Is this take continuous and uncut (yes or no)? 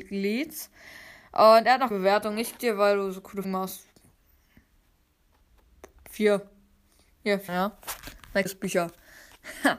no